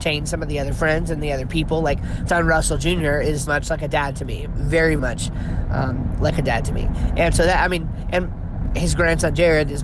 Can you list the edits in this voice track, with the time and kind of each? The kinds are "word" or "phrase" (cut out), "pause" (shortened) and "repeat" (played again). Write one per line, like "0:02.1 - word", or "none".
0:02.3 - phrase
0:03.5 - word
0:05.0 - word